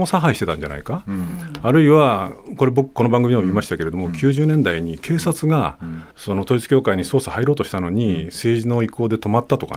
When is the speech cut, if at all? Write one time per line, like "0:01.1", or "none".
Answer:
0:06.1